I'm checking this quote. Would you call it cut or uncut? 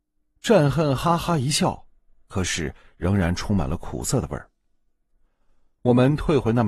uncut